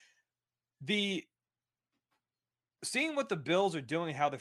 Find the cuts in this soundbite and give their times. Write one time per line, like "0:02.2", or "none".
none